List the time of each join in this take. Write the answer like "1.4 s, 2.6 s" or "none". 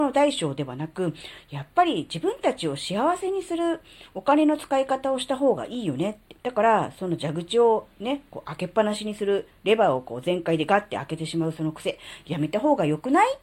6.4 s